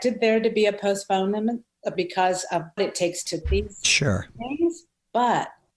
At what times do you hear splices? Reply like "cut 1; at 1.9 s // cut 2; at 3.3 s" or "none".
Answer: cut 1; at 1.9 s // cut 2; at 2.8 s // cut 3; at 3.4 s